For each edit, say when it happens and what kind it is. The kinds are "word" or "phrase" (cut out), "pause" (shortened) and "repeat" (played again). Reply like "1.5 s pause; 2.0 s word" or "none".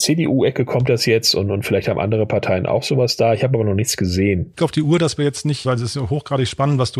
4.6 s phrase; 5.6 s word

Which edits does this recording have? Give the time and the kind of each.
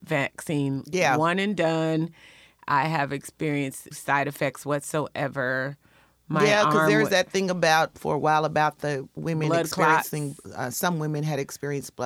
3.9 s word; 7.9 s word; 9.2 s word

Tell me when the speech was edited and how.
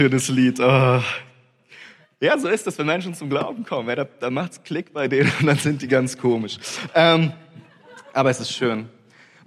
none

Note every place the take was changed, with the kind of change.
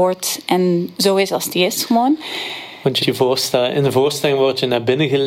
3.0 s word

